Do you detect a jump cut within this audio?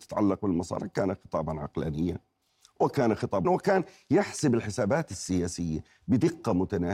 yes; 1 cut; at 3.4 s

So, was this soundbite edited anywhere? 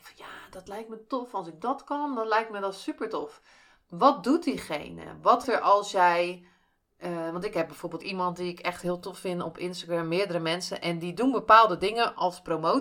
yes; 2 cuts; at 5.4 s, 8.0 s

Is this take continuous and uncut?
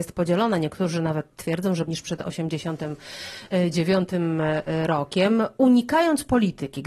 no; 1 cut; at 1.9 s

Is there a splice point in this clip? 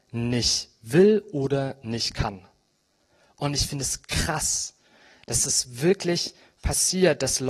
no; 0 cuts

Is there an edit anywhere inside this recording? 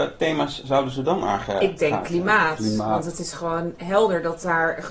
no; 0 cuts

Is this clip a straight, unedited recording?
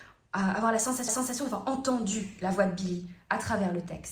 no; 1 cut; at 1.1 s

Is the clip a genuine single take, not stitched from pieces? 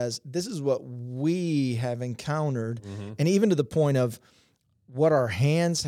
yes; 0 cuts

